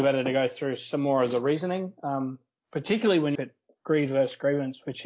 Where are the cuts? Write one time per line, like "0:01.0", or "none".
0:03.3